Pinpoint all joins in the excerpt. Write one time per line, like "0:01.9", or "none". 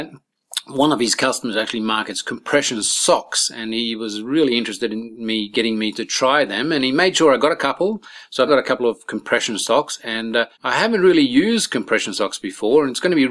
0:08.5
0:10.5